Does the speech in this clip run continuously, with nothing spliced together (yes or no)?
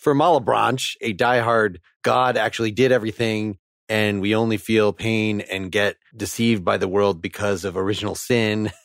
no